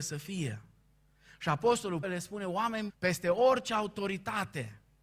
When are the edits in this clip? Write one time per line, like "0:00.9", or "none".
0:02.0
0:02.9